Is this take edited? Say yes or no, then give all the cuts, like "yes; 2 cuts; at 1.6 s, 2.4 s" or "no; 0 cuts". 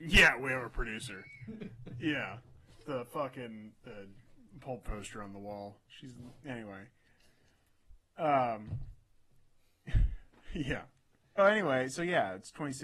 yes; 3 cuts; at 2.8 s, 4.8 s, 11.4 s